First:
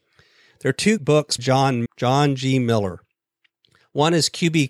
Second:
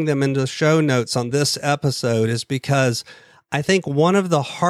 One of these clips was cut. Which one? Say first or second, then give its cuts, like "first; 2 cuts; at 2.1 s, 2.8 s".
first; 3 cuts; at 1.0 s, 1.4 s, 1.9 s